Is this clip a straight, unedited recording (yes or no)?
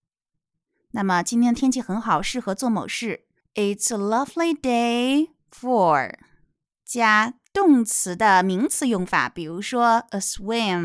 no